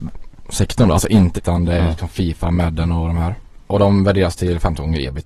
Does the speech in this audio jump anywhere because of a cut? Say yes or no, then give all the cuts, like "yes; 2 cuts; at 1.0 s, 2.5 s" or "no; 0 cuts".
yes; 2 cuts; at 1.4 s, 3.6 s